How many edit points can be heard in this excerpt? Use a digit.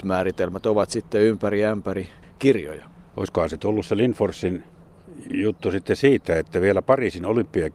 0